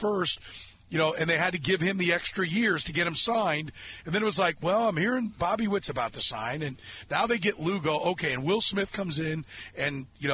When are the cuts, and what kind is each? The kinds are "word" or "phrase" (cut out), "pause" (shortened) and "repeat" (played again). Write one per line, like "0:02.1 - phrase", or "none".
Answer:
none